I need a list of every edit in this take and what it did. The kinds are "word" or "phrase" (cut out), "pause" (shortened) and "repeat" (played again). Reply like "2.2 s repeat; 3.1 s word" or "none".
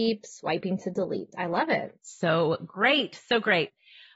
none